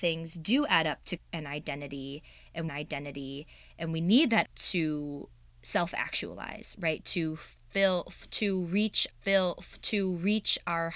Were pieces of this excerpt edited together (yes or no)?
yes